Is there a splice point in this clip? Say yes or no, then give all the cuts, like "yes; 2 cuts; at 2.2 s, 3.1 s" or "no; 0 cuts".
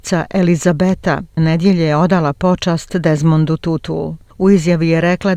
yes; 1 cut; at 1.4 s